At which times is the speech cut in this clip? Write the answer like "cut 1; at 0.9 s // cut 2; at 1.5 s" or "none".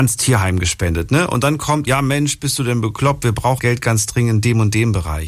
cut 1; at 1.9 s // cut 2; at 3.6 s

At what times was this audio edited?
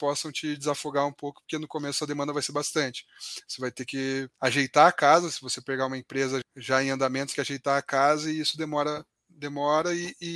cut 1; at 4.3 s // cut 2; at 6.4 s // cut 3; at 7.3 s

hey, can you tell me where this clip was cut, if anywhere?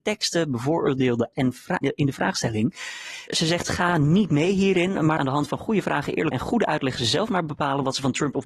cut 1; at 1.3 s // cut 2; at 1.8 s // cut 3; at 5.2 s // cut 4; at 6.3 s

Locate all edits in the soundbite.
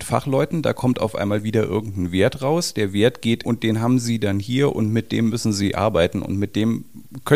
cut 1; at 3.4 s

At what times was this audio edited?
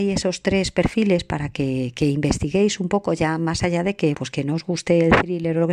cut 1; at 4.1 s

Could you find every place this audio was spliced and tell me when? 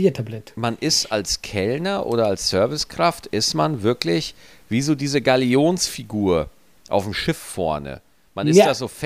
none

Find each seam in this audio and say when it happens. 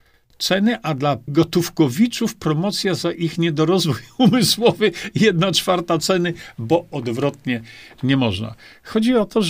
cut 1; at 1.3 s

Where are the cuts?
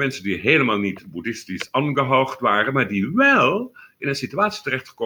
none

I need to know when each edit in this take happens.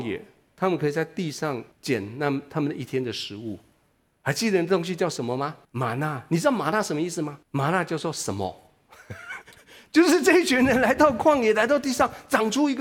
cut 1; at 1.7 s // cut 2; at 5.6 s // cut 3; at 7.4 s

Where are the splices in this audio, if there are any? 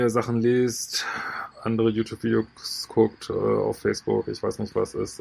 cut 1; at 1.5 s

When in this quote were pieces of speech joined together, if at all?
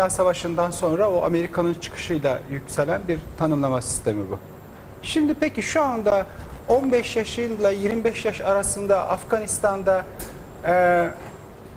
none

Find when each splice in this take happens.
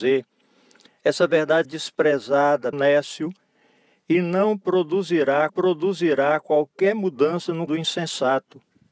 cut 1; at 1.6 s // cut 2; at 2.7 s // cut 3; at 5.5 s // cut 4; at 7.7 s

